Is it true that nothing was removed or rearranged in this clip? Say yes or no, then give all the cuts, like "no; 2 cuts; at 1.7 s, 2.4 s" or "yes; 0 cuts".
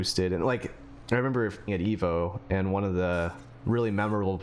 no; 1 cut; at 1.7 s